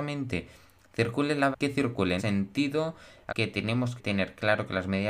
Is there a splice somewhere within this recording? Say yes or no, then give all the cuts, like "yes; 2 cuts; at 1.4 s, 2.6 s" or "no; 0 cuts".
yes; 4 cuts; at 1.5 s, 2.2 s, 3.3 s, 4.0 s